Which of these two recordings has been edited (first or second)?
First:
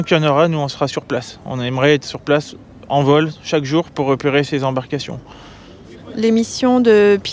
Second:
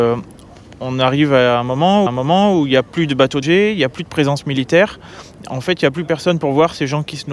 second